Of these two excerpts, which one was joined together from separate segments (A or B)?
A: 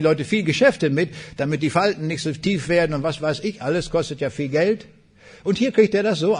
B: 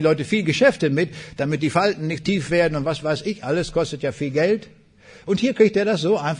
B